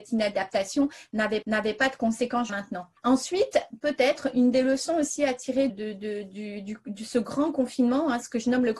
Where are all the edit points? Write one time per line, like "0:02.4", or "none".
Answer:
0:01.4
0:02.5
0:03.0
0:05.7